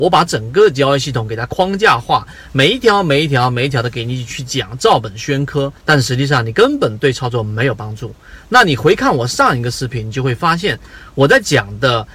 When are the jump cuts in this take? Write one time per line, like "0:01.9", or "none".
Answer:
0:05.8